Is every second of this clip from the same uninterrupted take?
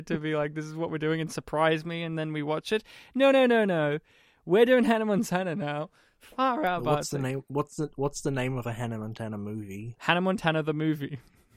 yes; 0 cuts

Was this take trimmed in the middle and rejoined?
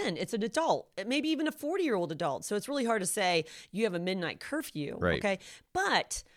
no; 0 cuts

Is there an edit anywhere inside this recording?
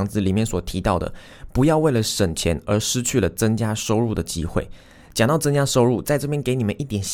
no; 0 cuts

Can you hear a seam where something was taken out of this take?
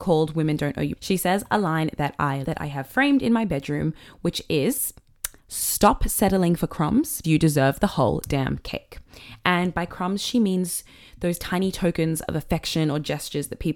yes; 4 cuts; at 1.0 s, 2.4 s, 5.4 s, 7.2 s

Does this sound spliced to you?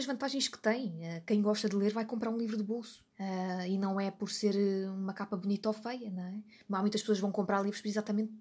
yes; 1 cut; at 3.1 s

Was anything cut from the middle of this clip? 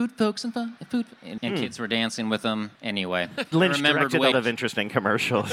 yes; 4 cuts; at 1.4 s, 2.7 s, 3.5 s, 4.3 s

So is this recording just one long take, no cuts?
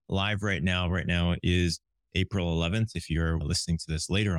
yes; 0 cuts

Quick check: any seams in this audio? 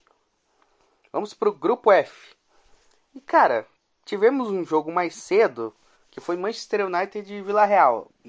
no; 0 cuts

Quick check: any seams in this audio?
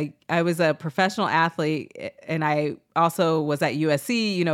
no; 0 cuts

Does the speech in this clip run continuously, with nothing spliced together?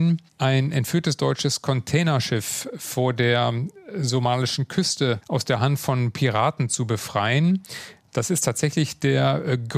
yes; 0 cuts

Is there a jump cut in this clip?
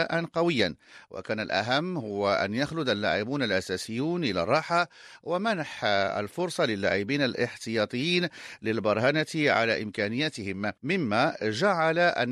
yes; 1 cut; at 10.8 s

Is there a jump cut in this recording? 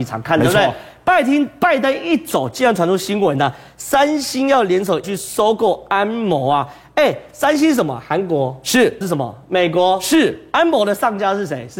yes; 2 cuts; at 5.0 s, 9.0 s

